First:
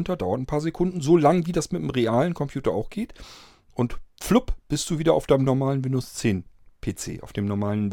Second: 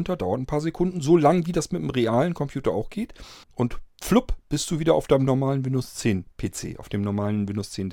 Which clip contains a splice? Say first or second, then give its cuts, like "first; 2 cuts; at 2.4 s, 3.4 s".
second; 2 cuts; at 3.4 s, 6.3 s